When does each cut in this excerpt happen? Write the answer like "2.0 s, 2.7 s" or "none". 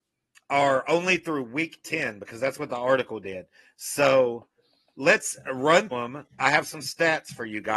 5.9 s